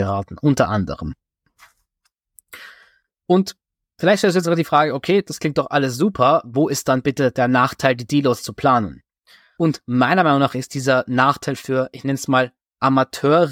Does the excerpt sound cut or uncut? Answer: uncut